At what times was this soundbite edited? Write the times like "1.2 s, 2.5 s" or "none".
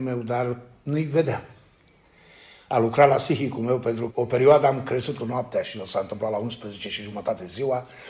4.1 s, 5.2 s